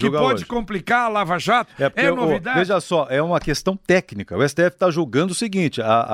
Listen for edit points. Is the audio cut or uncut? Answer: uncut